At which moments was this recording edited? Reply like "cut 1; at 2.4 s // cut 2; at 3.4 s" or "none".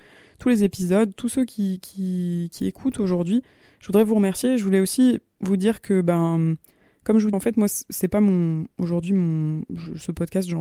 cut 1; at 7.3 s